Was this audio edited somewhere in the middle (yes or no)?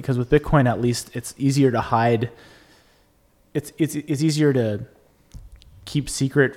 no